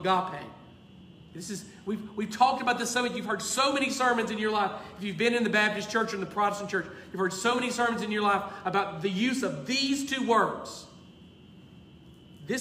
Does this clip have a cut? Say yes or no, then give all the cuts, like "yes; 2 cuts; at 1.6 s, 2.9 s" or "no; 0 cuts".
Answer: no; 0 cuts